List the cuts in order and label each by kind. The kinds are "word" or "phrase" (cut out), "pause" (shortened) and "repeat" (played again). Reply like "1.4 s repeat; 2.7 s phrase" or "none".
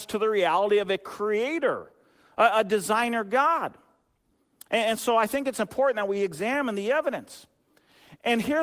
none